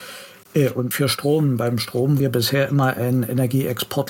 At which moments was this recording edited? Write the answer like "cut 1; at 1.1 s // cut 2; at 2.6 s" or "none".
cut 1; at 0.9 s // cut 2; at 2.2 s